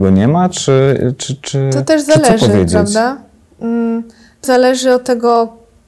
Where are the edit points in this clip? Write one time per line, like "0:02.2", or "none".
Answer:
0:04.4